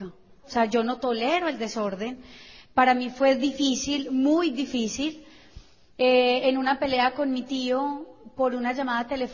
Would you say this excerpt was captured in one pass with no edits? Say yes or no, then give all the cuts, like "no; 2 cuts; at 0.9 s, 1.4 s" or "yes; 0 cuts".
yes; 0 cuts